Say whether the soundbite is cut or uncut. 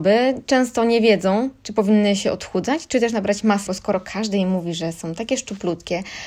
cut